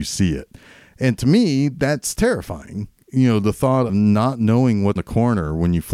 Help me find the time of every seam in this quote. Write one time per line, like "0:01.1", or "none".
0:03.9
0:05.0